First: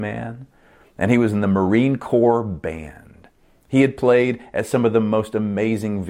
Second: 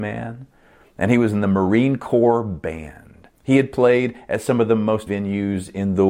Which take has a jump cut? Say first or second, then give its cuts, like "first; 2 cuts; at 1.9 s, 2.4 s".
second; 2 cuts; at 3.3 s, 5.1 s